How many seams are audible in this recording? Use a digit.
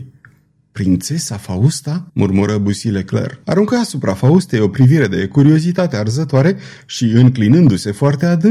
2